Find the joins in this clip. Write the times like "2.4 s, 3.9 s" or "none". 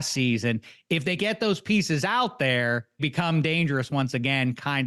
1.2 s, 3.0 s